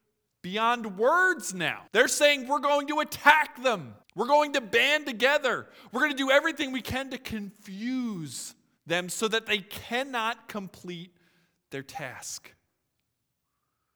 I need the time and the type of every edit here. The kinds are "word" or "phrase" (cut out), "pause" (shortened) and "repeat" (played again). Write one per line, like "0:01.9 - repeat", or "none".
0:01.9 - pause
0:04.0 - pause
0:08.8 - pause